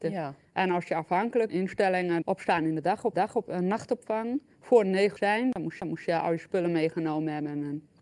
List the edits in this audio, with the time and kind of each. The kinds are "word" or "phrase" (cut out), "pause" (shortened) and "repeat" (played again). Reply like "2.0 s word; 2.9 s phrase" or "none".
1.5 s phrase; 2.2 s phrase; 3.1 s repeat; 5.2 s phrase; 5.8 s repeat